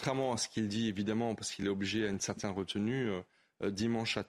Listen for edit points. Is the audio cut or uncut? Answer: uncut